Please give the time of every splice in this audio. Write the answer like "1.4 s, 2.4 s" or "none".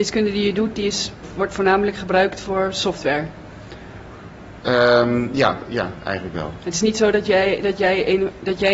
none